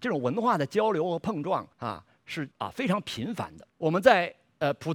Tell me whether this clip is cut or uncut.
cut